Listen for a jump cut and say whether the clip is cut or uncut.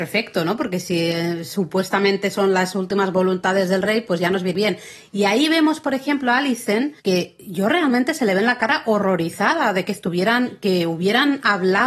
cut